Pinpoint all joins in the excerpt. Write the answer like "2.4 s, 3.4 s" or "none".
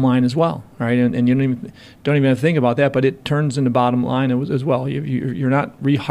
none